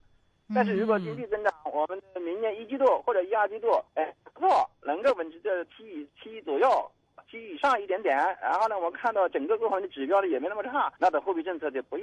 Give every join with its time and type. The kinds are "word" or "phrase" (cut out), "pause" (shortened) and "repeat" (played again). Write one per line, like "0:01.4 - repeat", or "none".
0:03.9 - pause
0:11.0 - pause

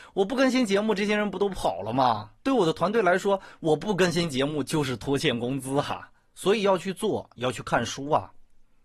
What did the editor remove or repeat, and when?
0:02.4 - pause

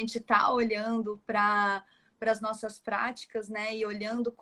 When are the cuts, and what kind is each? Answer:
none

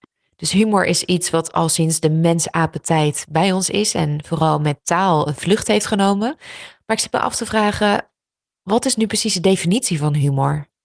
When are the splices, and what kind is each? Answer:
none

